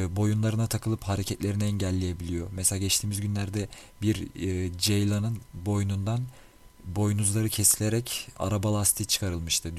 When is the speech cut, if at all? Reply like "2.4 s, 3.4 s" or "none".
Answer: none